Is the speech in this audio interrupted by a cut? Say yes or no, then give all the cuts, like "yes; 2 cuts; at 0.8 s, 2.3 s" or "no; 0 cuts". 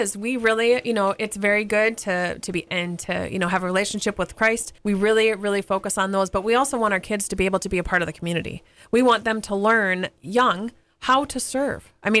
yes; 2 cuts; at 2.7 s, 4.8 s